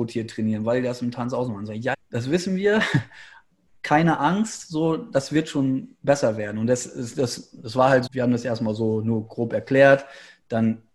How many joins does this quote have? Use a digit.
2